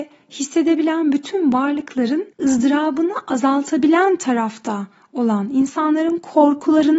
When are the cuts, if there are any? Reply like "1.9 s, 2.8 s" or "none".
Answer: 2.3 s

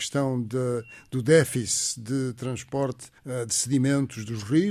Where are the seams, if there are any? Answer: 3.2 s

